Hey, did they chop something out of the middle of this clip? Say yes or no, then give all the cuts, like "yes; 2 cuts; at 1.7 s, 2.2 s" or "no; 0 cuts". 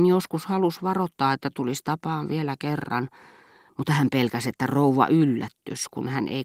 no; 0 cuts